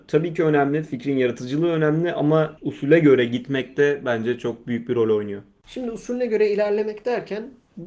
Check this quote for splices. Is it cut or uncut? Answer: uncut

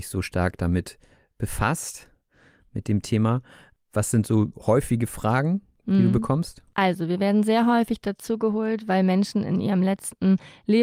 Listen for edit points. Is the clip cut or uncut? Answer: uncut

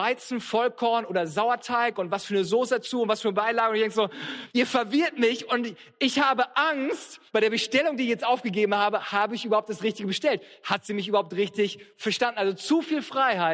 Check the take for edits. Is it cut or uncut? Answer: cut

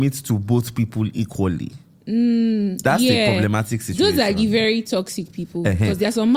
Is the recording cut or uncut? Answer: uncut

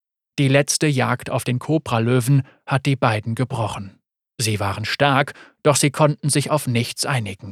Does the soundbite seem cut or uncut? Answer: uncut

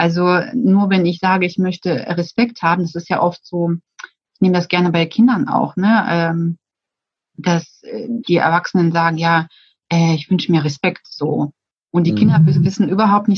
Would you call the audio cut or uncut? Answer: uncut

